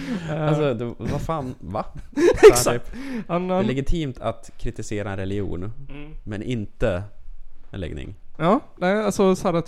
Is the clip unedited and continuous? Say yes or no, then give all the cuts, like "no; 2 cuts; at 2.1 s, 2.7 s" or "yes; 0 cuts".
yes; 0 cuts